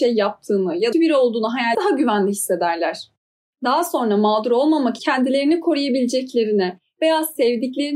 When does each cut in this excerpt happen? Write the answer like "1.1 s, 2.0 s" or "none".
0.9 s, 1.7 s, 5.0 s